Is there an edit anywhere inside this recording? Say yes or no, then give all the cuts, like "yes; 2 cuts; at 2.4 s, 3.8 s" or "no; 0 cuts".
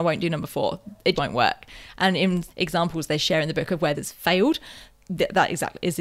yes; 3 cuts; at 1.1 s, 2.5 s, 3.9 s